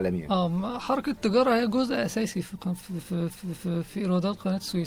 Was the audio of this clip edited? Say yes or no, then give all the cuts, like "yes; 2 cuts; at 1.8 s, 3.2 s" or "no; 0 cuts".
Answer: yes; 1 cut; at 3.3 s